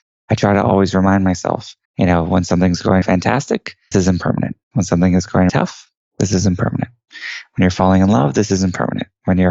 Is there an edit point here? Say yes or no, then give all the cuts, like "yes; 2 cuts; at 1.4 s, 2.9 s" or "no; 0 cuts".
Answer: yes; 5 cuts; at 1.8 s, 3.0 s, 3.9 s, 4.6 s, 5.5 s